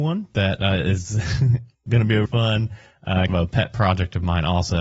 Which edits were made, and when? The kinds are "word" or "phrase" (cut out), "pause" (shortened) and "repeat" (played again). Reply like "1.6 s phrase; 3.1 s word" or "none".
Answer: 1.9 s word; 2.2 s word; 3.3 s word